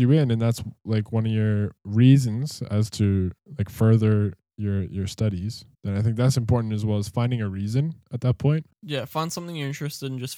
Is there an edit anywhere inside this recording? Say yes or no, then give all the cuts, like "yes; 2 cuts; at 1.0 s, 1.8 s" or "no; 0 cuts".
yes; 2 cuts; at 5.7 s, 8.7 s